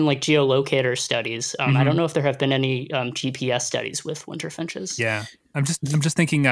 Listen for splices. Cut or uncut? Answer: uncut